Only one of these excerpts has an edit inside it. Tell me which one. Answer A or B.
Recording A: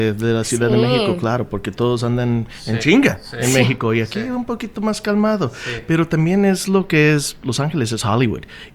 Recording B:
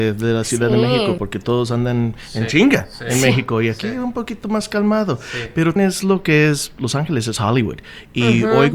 B